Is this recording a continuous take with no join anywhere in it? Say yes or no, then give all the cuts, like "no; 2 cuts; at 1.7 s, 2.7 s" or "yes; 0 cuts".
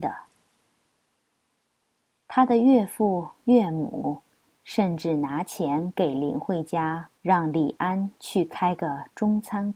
no; 1 cut; at 7.2 s